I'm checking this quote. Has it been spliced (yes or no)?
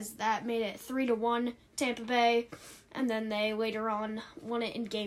no